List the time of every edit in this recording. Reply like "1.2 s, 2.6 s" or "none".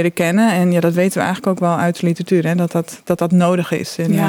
none